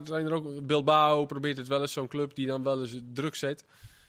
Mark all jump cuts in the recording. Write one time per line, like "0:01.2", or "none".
0:01.3

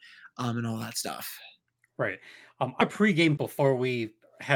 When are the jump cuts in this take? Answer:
0:02.8
0:03.4

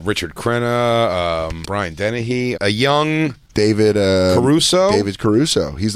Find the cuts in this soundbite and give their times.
0:01.6
0:02.5

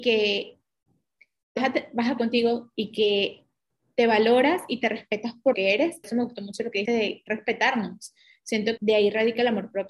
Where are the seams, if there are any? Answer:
0:01.6
0:02.2
0:02.7
0:05.5
0:06.0
0:06.8
0:07.3
0:08.8

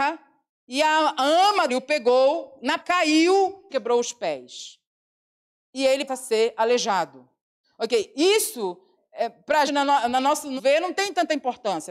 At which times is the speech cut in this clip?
0:01.7
0:02.8
0:03.7
0:06.1
0:09.0
0:09.7
0:10.6

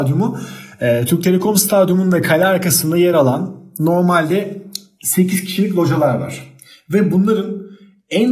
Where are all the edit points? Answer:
none

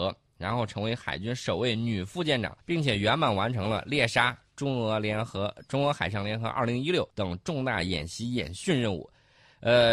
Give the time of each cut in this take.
0:02.6
0:07.1

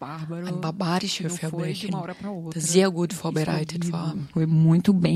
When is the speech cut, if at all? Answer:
none

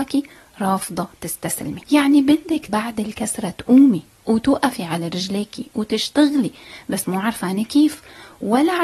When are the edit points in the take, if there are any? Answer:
0:01.8
0:02.7

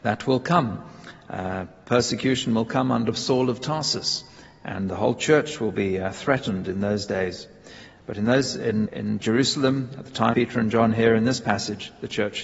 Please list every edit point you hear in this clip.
0:08.9
0:10.3

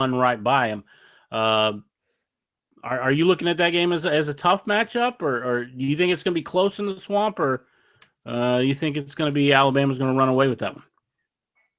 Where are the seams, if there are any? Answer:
none

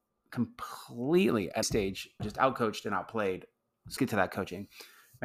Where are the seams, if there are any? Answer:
0:01.6
0:02.2
0:04.0

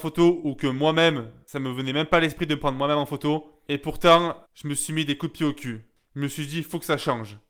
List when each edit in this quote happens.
0:04.4

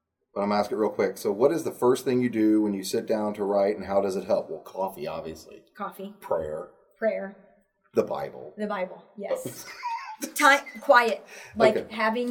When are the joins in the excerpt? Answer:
none

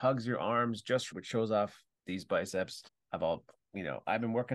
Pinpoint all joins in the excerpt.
0:01.1
0:02.0
0:02.9

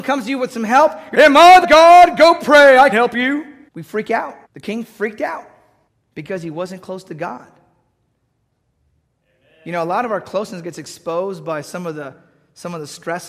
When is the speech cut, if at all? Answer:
0:01.1
0:01.6
0:02.9
0:03.7
0:04.4
0:05.9

